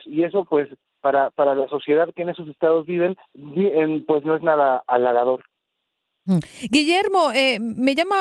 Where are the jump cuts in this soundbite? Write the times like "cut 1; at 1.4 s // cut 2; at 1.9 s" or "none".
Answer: cut 1; at 3.3 s